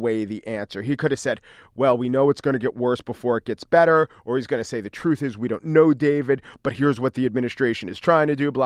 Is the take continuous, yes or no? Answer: yes